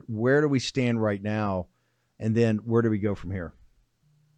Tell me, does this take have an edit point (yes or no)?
no